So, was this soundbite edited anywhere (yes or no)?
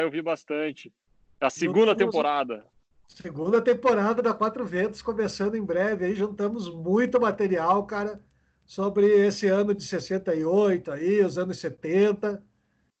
no